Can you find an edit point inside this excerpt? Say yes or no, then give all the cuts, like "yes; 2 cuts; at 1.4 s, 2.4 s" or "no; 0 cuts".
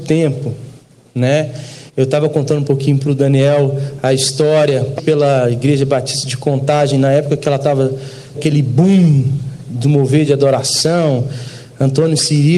yes; 3 cuts; at 1.9 s, 5.0 s, 8.3 s